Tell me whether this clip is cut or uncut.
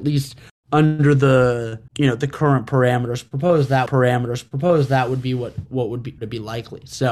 cut